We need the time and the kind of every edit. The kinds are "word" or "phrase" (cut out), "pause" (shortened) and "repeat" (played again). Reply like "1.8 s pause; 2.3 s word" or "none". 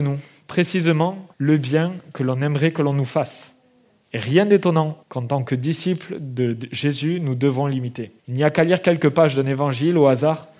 1.3 s pause; 5.0 s pause; 8.2 s pause